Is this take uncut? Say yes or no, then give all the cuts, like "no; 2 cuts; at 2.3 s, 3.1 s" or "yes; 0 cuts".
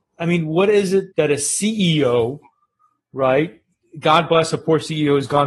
no; 1 cut; at 1.1 s